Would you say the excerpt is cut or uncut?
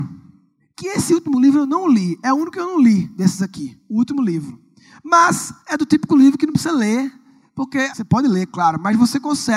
cut